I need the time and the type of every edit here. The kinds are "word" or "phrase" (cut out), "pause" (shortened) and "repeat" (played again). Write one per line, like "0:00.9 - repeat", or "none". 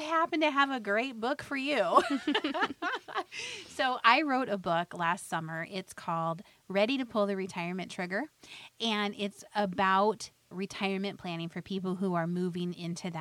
0:10.5 - word